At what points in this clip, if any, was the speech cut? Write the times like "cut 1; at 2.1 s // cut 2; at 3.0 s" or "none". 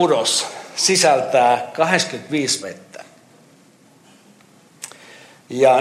cut 1; at 2.6 s